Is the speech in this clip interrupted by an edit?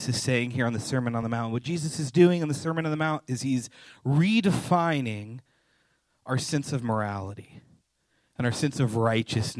no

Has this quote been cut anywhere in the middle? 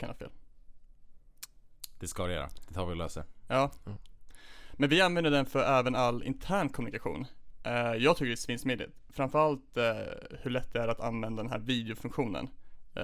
no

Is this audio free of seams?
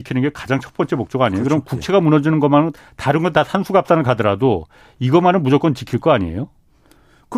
yes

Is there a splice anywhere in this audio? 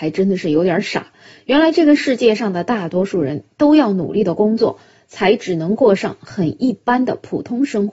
no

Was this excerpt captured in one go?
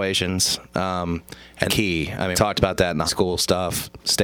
no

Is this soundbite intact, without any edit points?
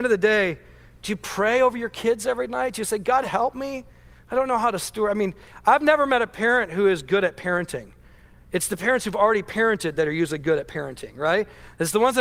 yes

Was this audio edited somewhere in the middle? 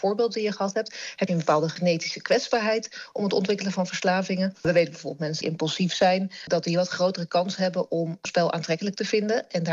yes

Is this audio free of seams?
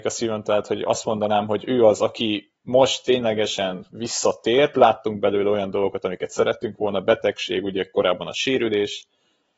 yes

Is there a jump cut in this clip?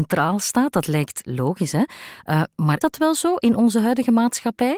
yes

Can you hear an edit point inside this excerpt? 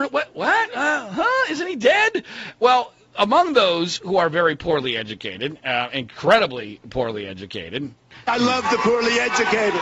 no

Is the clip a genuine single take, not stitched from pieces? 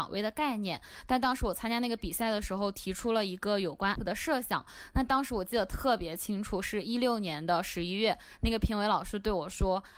no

